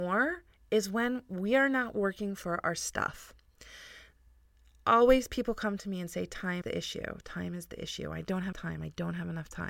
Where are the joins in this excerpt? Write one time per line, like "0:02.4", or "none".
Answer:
0:06.6
0:08.5